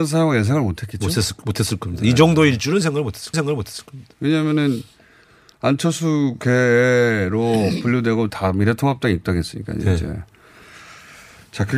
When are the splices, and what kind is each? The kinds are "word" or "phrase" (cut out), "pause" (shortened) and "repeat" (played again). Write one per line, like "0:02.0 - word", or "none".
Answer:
0:03.3 - repeat
0:08.3 - phrase